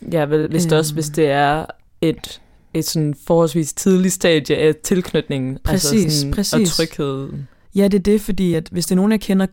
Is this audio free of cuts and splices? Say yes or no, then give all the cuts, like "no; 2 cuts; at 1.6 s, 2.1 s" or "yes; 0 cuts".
yes; 0 cuts